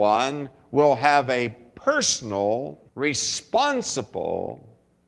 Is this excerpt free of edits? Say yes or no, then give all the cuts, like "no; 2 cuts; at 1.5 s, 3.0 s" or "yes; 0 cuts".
no; 1 cut; at 2.9 s